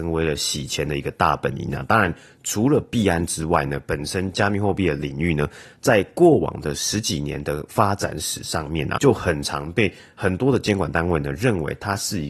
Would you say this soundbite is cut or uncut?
cut